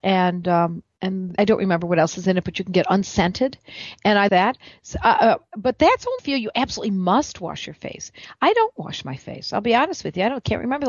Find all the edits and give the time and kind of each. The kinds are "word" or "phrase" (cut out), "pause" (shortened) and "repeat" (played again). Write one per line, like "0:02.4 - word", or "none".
0:01.4 - word
0:04.3 - word
0:06.2 - phrase